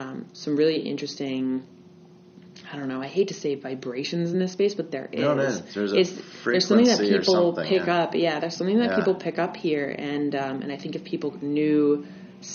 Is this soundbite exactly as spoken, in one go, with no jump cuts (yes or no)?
yes